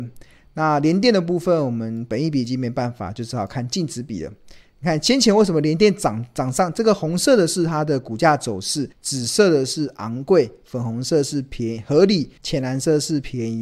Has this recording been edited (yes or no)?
yes